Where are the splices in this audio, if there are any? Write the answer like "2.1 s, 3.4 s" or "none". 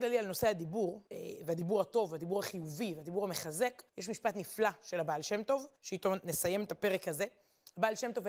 1.1 s, 3.9 s, 5.8 s